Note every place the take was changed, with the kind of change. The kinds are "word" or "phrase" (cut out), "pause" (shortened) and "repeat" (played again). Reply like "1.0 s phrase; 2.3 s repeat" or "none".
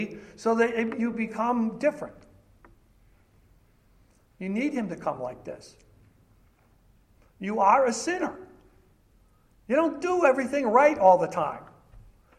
none